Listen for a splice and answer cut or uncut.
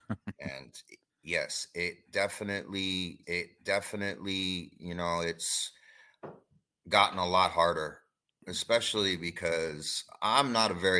cut